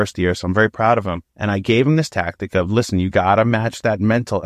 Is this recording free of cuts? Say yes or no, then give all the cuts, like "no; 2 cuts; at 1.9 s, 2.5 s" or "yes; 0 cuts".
no; 1 cut; at 1.3 s